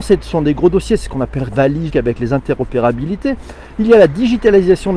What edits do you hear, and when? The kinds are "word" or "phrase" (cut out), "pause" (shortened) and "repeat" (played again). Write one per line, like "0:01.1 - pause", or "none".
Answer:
0:01.5 - word
0:01.9 - word